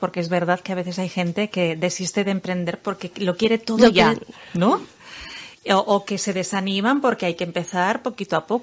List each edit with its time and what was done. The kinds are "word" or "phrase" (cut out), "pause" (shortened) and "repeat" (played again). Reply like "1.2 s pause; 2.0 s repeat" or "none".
none